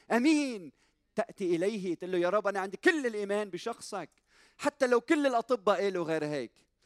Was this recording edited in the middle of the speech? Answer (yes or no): no